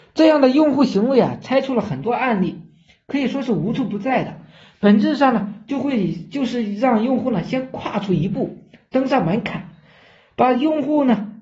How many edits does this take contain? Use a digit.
0